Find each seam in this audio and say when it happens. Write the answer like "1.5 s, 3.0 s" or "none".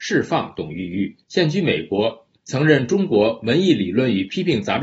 1.2 s, 2.4 s